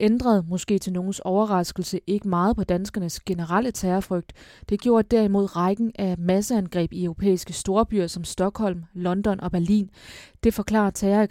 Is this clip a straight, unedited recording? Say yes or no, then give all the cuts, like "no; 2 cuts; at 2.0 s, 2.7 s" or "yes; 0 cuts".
yes; 0 cuts